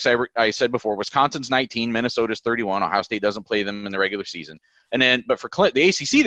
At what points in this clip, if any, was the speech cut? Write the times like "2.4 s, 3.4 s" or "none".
none